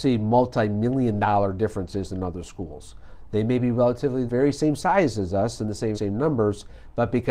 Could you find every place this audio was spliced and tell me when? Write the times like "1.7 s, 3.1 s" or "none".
4.3 s, 5.9 s